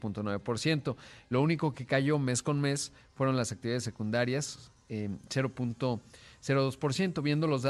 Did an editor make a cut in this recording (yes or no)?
no